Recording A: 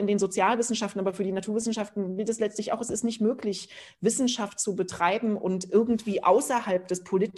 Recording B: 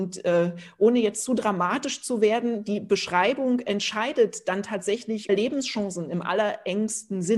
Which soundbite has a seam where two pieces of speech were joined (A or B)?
B